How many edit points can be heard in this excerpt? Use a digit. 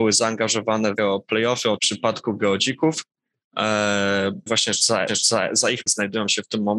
5